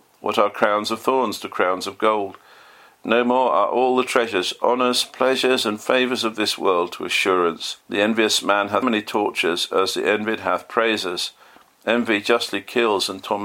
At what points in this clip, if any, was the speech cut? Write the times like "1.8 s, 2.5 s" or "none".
7.8 s, 8.8 s